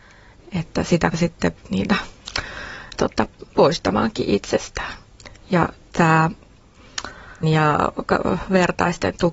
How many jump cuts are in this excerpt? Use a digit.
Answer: 4